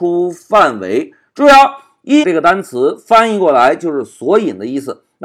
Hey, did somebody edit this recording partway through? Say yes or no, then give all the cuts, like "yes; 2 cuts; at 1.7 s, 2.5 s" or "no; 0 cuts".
yes; 1 cut; at 2.2 s